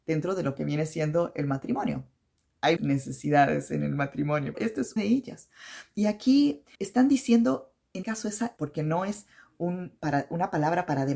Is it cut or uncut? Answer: cut